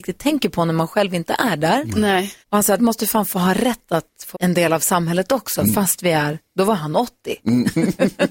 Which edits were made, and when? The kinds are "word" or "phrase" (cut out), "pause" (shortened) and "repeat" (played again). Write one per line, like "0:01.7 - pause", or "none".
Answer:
0:02.4 - pause
0:02.8 - word
0:04.3 - word